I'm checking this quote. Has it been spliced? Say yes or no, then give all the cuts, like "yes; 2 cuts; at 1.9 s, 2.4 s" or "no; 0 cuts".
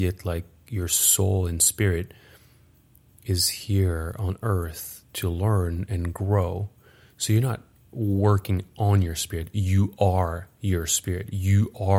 no; 0 cuts